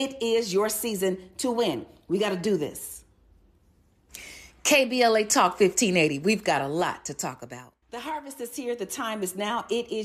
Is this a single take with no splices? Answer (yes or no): no